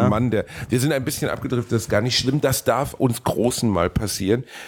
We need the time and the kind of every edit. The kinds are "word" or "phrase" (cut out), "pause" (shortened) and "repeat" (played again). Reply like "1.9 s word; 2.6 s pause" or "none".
3.0 s word